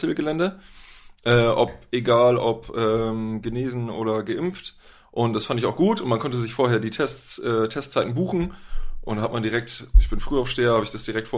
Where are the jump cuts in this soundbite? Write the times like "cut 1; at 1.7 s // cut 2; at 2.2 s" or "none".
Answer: none